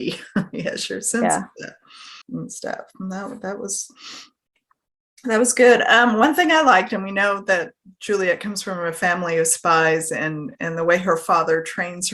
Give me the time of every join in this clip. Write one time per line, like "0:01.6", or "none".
0:02.2

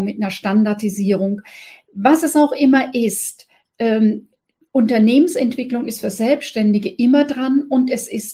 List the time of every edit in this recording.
none

